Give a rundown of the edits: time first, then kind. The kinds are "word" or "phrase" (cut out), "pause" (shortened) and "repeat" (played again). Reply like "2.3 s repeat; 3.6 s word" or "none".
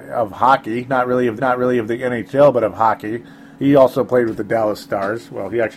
1.4 s repeat; 3.5 s pause